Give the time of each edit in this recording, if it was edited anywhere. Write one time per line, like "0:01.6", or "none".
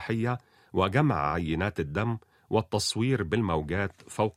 none